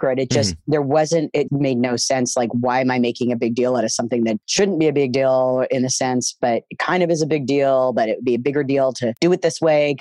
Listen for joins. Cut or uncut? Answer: cut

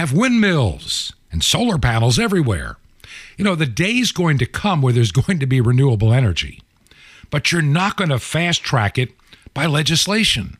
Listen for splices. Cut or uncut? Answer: uncut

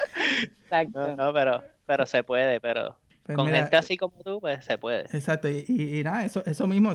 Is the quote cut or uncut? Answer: uncut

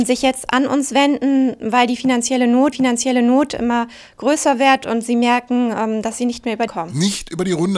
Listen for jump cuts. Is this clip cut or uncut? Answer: cut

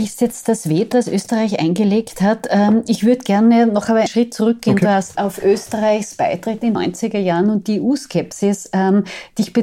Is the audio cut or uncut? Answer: cut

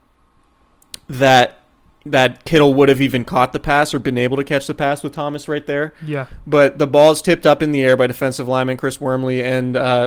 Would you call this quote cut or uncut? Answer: uncut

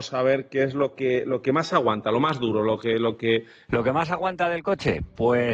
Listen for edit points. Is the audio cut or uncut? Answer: uncut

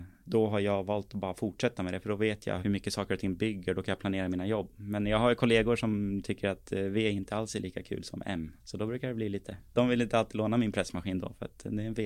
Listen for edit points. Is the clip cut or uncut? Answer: cut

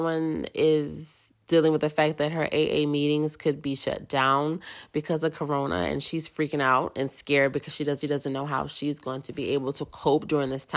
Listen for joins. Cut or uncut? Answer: cut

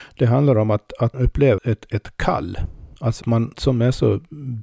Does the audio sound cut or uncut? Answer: cut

